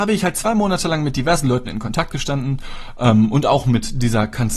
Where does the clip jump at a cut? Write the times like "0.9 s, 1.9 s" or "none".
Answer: none